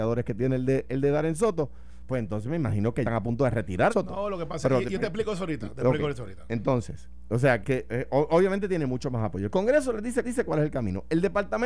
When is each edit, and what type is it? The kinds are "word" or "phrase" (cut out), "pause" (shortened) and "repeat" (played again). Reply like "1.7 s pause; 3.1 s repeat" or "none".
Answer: 3.0 s phrase; 3.9 s phrase; 7.6 s word; 10.2 s repeat